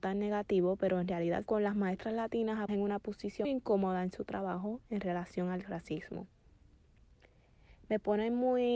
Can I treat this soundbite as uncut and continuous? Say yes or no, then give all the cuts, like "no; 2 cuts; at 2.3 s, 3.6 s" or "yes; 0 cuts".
no; 3 cuts; at 1.4 s, 2.7 s, 3.4 s